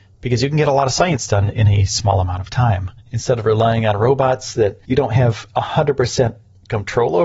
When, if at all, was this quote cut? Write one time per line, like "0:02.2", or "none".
0:03.0
0:04.8